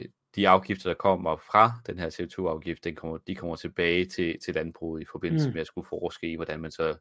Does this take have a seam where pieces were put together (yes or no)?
no